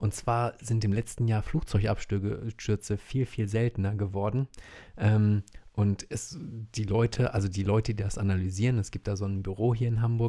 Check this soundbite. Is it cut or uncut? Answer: uncut